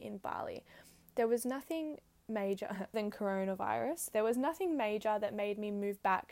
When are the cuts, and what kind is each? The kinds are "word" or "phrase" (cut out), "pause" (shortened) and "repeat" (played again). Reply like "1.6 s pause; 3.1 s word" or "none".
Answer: 2.9 s word